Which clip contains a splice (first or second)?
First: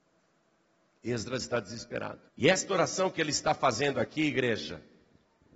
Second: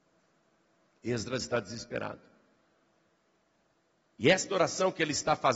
first